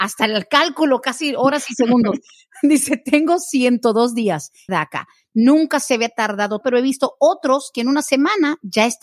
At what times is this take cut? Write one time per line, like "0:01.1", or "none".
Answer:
0:04.7
0:06.6